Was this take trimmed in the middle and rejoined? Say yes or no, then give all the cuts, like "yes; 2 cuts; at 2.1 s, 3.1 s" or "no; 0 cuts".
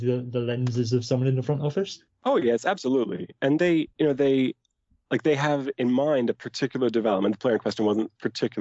yes; 2 cuts; at 2.1 s, 3.9 s